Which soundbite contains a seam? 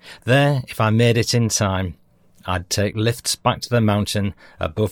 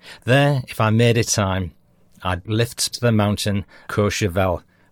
second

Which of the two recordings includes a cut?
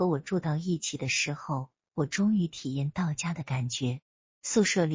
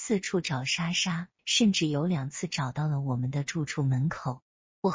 second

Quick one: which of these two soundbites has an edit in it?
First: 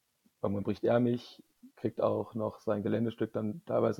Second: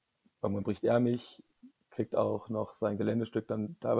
first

